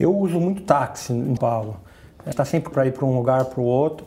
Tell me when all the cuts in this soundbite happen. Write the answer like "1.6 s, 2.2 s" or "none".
1.4 s, 2.3 s, 2.7 s